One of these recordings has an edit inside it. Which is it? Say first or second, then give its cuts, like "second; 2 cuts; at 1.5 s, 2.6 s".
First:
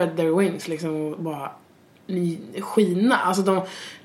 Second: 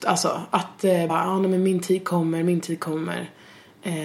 second; 1 cut; at 1.1 s